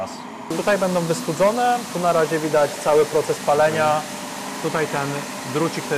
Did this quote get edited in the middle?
yes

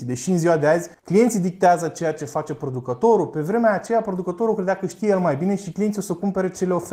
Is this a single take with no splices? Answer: no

